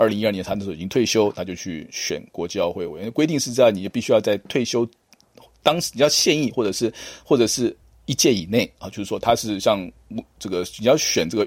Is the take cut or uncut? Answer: uncut